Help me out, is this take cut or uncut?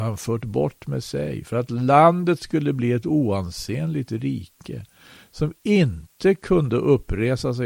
uncut